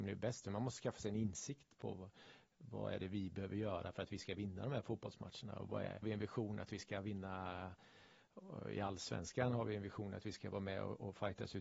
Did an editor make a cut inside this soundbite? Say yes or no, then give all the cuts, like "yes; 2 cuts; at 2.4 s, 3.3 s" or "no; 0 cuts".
yes; 1 cut; at 6.0 s